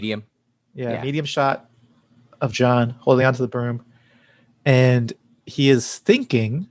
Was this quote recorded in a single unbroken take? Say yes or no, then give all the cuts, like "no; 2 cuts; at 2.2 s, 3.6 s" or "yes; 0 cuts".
yes; 0 cuts